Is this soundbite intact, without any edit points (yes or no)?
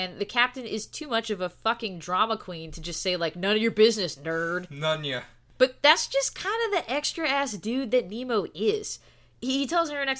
yes